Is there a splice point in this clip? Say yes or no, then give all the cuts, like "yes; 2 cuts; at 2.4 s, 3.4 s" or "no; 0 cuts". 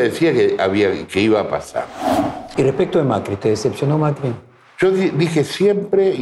no; 0 cuts